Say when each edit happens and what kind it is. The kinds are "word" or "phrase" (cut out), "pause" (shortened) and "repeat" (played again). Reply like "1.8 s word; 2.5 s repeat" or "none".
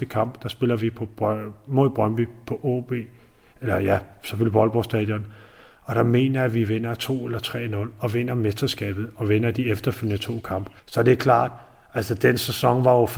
10.8 s pause